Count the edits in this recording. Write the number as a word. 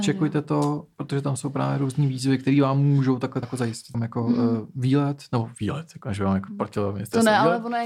two